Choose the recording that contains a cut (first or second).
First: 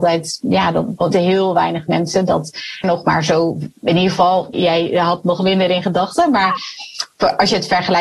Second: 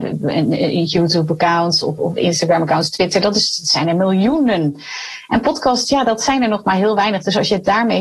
first